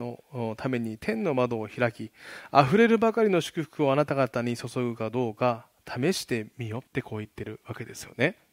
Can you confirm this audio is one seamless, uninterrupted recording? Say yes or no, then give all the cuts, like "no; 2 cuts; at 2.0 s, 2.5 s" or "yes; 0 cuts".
no; 1 cut; at 6.9 s